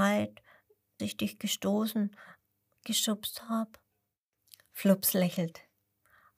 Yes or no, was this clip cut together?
yes